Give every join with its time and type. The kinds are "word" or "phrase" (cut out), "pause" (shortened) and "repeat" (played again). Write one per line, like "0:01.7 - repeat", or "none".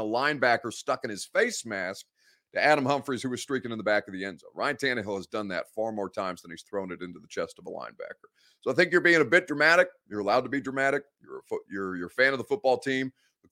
none